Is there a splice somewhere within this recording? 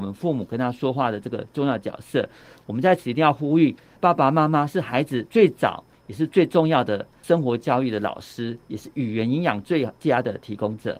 no; 0 cuts

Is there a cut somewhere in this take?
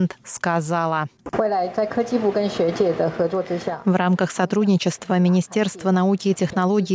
no; 0 cuts

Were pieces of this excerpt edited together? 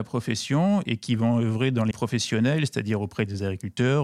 yes; 1 cut; at 1.9 s

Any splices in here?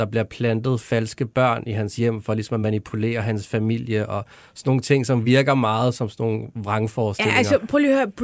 no; 0 cuts

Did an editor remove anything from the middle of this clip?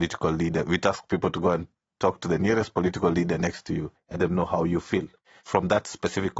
yes; 1 cut; at 4.1 s

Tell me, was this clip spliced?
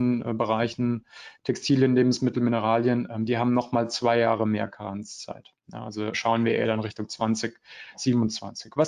yes; 1 cut; at 6.1 s

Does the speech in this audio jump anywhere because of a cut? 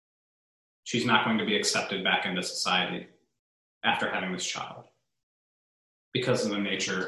no; 0 cuts

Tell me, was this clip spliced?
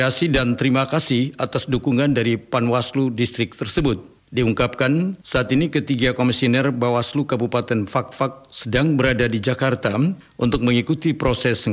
no; 0 cuts

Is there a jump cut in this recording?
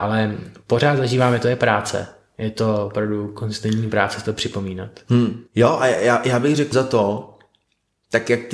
yes; 2 cuts; at 5.5 s, 6.7 s

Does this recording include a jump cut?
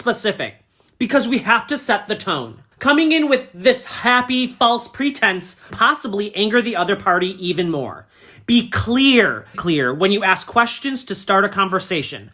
yes; 3 cuts; at 2.7 s, 5.7 s, 9.5 s

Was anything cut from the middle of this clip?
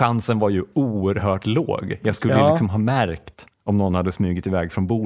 yes; 1 cut; at 3.5 s

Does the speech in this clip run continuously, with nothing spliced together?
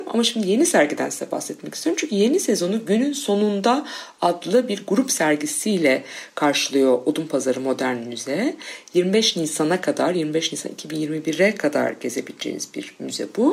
yes; 0 cuts

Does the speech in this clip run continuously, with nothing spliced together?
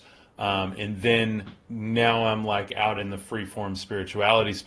yes; 0 cuts

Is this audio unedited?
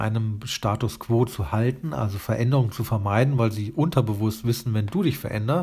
yes; 0 cuts

